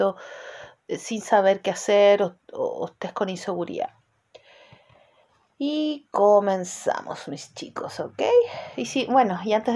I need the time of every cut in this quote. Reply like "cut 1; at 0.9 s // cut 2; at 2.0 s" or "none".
none